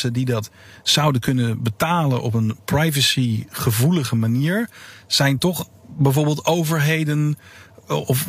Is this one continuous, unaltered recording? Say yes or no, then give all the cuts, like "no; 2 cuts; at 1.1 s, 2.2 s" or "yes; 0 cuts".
yes; 0 cuts